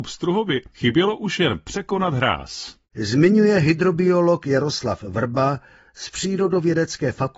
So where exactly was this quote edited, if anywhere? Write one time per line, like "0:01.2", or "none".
0:02.8